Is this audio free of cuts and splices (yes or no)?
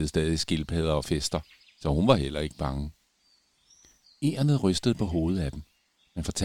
yes